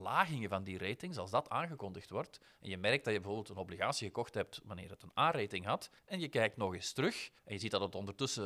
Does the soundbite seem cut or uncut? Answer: cut